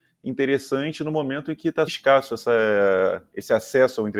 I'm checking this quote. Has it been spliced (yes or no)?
yes